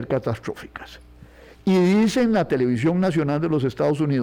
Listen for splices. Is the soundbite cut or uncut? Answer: uncut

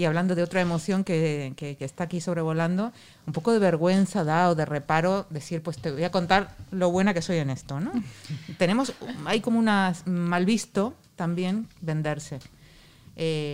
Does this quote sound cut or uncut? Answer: uncut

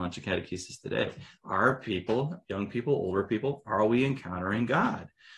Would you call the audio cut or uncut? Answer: uncut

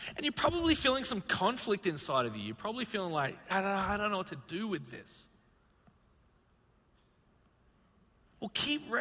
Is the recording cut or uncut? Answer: cut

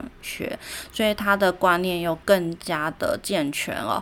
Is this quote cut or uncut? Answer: cut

